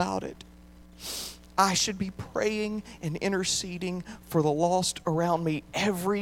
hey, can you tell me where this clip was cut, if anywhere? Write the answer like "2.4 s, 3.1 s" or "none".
none